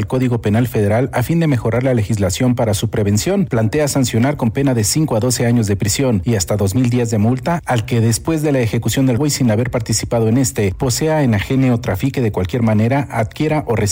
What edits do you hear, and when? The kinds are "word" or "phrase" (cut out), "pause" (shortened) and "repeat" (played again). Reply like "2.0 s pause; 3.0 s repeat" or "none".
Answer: 9.2 s word